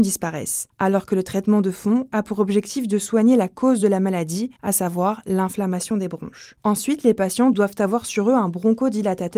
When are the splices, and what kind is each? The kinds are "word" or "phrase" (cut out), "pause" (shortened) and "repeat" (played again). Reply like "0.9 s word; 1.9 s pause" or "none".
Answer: none